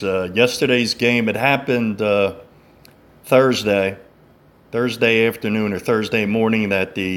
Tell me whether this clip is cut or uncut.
uncut